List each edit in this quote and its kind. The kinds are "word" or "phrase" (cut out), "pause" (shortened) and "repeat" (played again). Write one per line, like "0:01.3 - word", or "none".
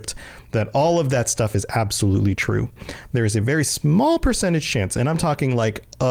none